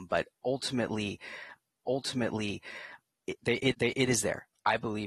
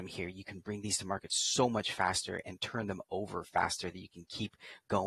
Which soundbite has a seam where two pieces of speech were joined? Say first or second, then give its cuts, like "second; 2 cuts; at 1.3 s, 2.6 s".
first; 2 cuts; at 1.8 s, 3.7 s